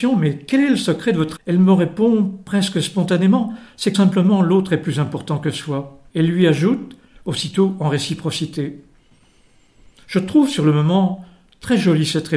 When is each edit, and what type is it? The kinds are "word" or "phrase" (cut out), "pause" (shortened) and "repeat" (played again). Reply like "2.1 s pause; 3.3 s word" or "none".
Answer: 1.4 s word; 3.9 s word; 6.1 s pause